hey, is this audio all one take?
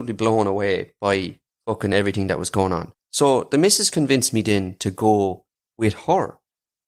no; 1 cut; at 2.9 s

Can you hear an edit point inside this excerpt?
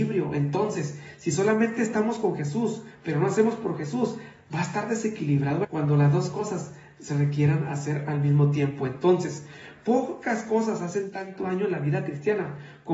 yes; 1 cut; at 5.6 s

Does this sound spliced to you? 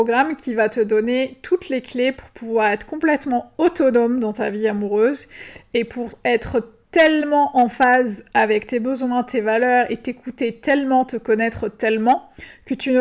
no; 0 cuts

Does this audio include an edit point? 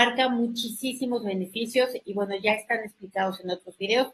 no; 0 cuts

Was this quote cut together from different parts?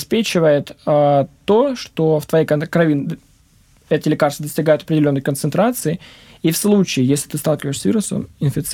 no; 0 cuts

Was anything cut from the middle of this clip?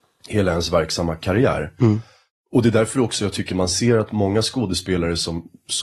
no; 0 cuts

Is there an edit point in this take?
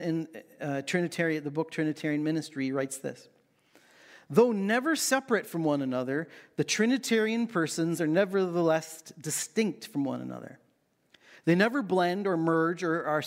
no; 0 cuts

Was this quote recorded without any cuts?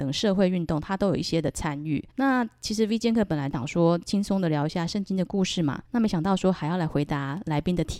no; 2 cuts; at 2.1 s, 5.8 s

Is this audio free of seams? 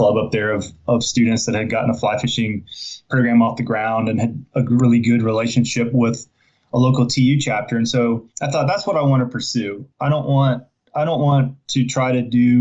no; 1 cut; at 8.3 s

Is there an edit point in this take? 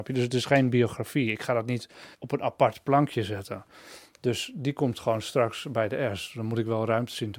yes; 1 cut; at 2.1 s

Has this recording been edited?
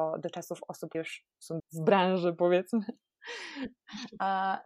yes; 2 cuts; at 0.9 s, 1.6 s

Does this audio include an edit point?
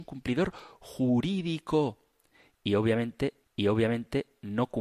yes; 1 cut; at 3.4 s

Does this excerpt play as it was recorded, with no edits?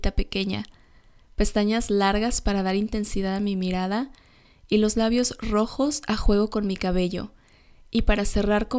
yes; 0 cuts

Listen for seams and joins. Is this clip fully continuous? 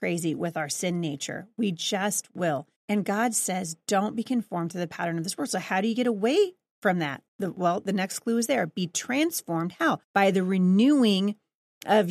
no; 3 cuts; at 2.8 s, 7.3 s, 10.0 s

